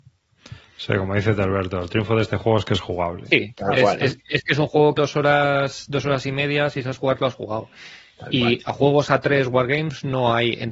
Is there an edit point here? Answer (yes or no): yes